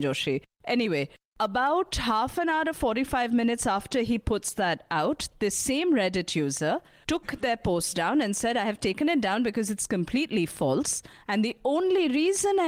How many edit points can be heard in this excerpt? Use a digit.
0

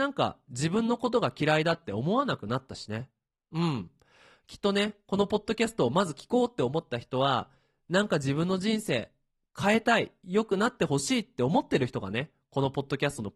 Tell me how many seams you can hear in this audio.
0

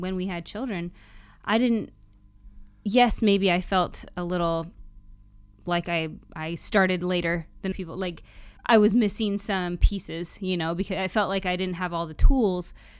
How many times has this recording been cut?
2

